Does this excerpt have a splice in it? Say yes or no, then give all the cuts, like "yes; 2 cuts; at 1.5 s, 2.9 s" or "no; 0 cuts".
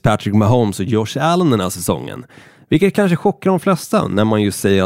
no; 0 cuts